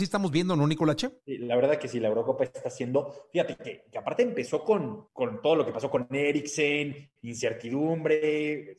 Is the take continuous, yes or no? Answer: yes